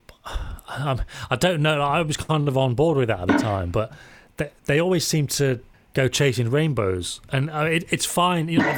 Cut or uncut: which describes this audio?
uncut